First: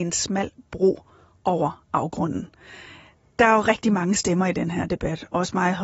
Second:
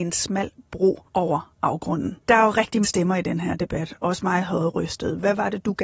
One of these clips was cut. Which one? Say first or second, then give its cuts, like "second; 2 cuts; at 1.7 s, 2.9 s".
second; 3 cuts; at 1.1 s, 2.2 s, 2.8 s